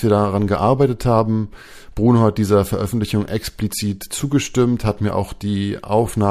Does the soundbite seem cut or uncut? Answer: uncut